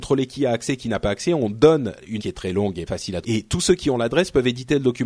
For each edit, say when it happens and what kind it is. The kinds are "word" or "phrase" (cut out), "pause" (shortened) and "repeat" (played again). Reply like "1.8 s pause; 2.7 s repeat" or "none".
2.2 s word; 2.9 s word; 3.2 s word